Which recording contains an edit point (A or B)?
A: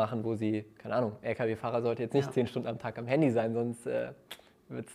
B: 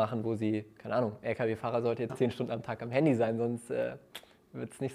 B